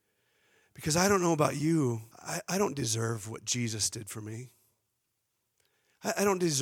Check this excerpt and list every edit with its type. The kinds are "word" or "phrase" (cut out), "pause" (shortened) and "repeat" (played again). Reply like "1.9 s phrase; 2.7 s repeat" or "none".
2.1 s pause